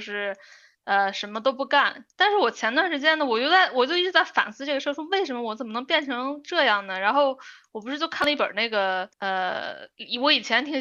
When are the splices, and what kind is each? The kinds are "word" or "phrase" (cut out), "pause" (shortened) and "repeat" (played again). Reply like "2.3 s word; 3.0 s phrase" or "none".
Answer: 2.1 s pause; 9.1 s pause

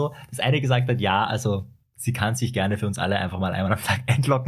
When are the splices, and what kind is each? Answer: none

